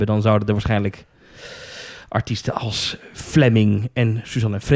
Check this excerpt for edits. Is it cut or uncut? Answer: uncut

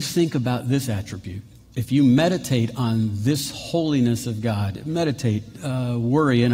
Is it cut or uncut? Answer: uncut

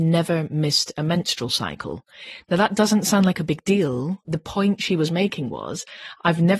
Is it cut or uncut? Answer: uncut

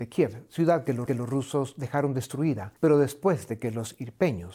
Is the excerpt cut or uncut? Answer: cut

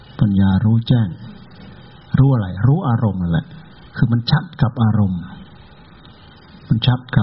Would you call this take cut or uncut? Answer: uncut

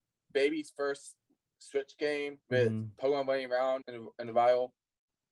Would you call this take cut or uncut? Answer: cut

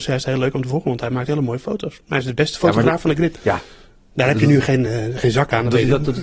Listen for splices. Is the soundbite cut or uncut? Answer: uncut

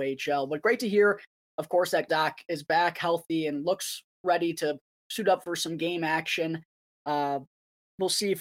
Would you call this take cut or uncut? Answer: cut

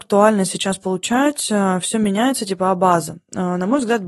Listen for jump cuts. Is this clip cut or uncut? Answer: uncut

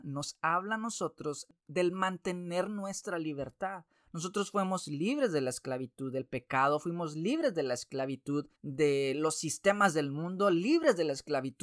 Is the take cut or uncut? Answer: cut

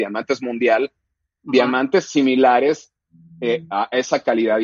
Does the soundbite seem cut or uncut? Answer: uncut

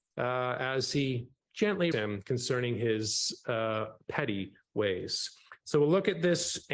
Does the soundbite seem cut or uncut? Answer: cut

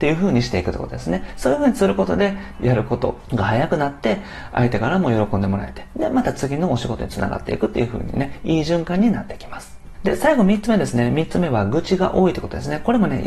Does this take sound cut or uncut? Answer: uncut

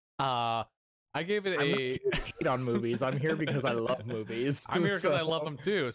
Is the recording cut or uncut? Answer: uncut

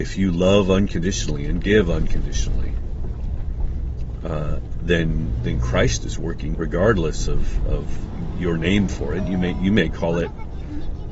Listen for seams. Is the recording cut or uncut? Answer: cut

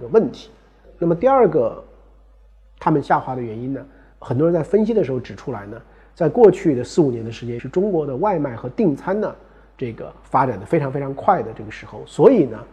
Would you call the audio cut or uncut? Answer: cut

